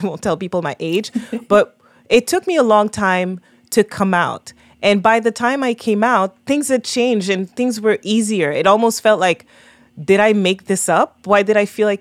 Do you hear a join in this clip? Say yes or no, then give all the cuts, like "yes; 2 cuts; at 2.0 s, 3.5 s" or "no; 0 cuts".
no; 0 cuts